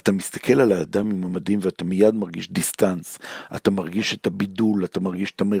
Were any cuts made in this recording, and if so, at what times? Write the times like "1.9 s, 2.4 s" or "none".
none

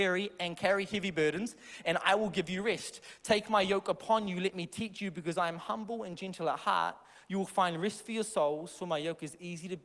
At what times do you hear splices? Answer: none

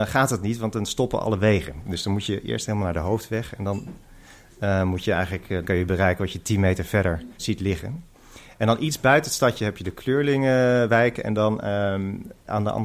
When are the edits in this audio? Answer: 5.6 s

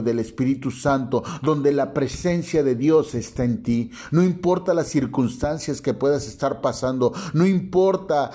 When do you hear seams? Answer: none

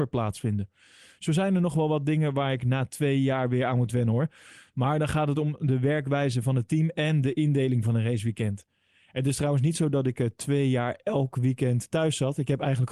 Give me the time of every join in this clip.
none

